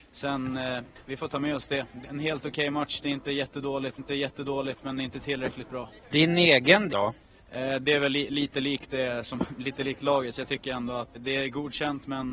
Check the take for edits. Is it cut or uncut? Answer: cut